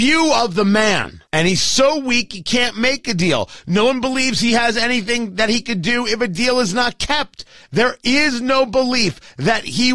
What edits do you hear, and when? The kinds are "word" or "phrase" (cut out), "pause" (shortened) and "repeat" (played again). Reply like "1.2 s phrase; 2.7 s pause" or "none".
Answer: 1.3 s pause